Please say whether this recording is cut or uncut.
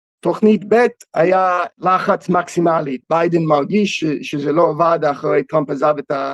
cut